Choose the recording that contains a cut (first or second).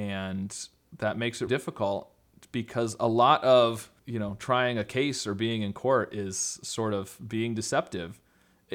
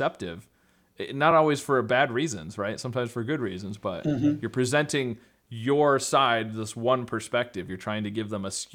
first